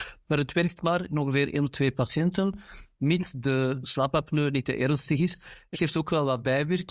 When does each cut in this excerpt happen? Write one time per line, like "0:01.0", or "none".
0:05.7